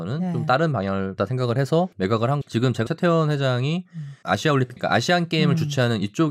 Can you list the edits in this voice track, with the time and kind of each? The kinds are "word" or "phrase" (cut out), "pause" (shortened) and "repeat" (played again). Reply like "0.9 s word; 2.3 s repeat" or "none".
1.2 s word; 1.9 s pause; 2.4 s word; 2.9 s word; 4.2 s word; 4.8 s word

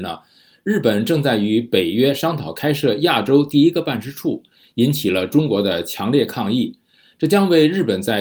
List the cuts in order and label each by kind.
none

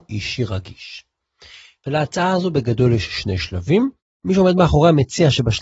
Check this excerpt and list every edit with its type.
none

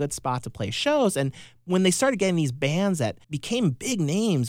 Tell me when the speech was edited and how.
3.2 s pause

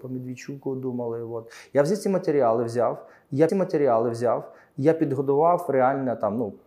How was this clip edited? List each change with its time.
3.5 s repeat

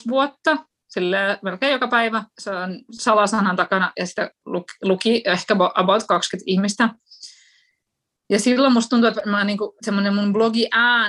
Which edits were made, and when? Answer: 2.3 s pause

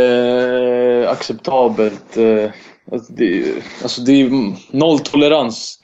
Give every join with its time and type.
none

